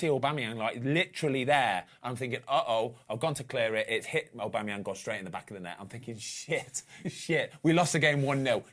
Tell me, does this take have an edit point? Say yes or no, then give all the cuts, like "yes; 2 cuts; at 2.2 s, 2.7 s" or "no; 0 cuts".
no; 0 cuts